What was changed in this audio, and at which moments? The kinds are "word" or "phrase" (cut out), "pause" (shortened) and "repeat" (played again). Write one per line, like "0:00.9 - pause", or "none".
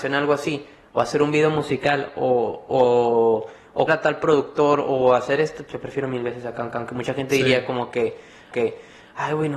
0:03.9 - word
0:06.7 - repeat
0:08.5 - repeat